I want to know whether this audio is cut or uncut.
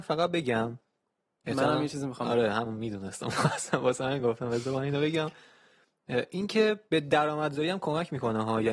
uncut